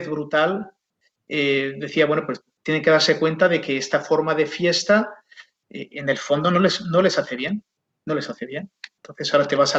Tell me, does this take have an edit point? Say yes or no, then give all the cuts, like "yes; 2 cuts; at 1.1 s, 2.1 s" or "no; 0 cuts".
no; 0 cuts